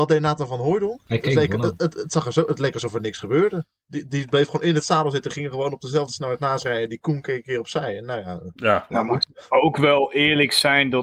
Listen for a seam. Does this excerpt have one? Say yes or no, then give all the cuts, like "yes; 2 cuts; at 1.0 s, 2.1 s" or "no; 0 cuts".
no; 0 cuts